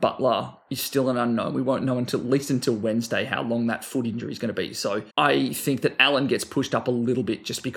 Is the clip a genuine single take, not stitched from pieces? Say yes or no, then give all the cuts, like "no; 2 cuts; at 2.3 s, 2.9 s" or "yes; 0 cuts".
no; 1 cut; at 5.1 s